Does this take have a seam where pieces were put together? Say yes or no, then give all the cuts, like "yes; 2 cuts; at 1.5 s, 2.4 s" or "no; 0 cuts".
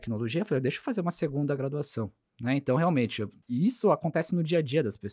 no; 0 cuts